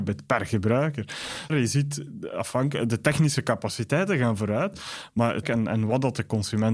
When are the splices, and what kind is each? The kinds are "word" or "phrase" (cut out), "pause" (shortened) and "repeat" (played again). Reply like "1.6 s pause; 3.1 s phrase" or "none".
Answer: 1.5 s phrase; 5.4 s word